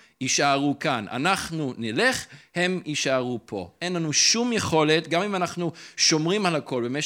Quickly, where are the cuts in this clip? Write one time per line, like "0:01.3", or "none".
none